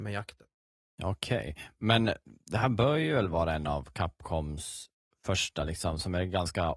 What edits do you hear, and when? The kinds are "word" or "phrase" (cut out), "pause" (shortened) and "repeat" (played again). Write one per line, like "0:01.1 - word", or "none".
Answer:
none